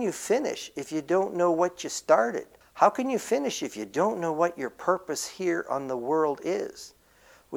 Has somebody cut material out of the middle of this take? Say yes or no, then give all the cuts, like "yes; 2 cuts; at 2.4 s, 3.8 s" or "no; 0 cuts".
yes; 1 cut; at 2.6 s